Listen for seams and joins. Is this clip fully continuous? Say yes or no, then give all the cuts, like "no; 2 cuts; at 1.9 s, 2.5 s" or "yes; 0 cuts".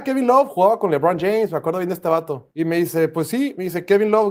no; 1 cut; at 2.5 s